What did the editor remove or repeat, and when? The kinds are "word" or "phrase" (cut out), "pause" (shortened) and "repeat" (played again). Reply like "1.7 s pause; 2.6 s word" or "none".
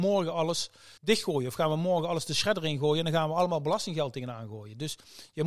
1.0 s pause